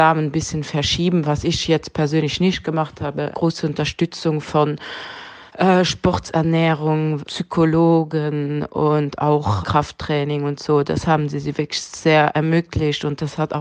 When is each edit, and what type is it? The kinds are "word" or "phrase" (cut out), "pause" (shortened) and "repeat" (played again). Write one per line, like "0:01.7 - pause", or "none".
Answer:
0:03.3 - phrase
0:05.5 - pause
0:07.2 - word
0:09.6 - word